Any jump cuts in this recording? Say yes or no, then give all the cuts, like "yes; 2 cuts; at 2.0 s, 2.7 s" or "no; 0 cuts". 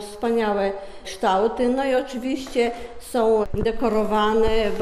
no; 0 cuts